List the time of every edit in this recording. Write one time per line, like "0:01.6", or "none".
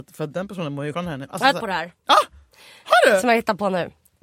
0:00.9
0:01.6
0:02.0